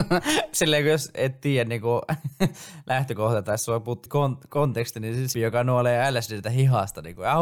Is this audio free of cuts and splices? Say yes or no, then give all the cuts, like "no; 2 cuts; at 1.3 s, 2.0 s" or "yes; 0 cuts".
no; 2 cuts; at 4.1 s, 5.3 s